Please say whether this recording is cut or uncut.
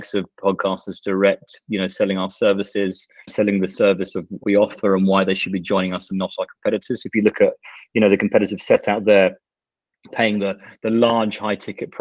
cut